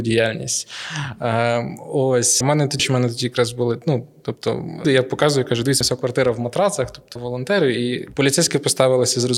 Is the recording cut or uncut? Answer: cut